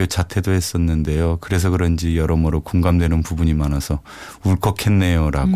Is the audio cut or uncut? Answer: uncut